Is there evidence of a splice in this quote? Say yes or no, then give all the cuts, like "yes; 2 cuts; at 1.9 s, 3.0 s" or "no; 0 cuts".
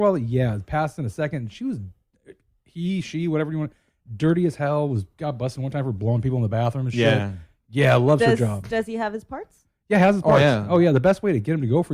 no; 0 cuts